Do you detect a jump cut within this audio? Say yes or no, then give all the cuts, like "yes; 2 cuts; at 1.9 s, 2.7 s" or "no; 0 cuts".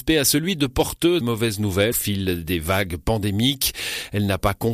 yes; 2 cuts; at 1.2 s, 1.9 s